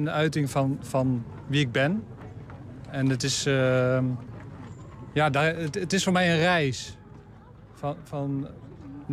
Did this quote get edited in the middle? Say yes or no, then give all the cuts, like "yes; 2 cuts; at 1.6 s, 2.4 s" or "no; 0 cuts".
no; 0 cuts